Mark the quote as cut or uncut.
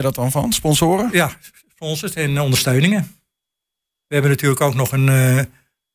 uncut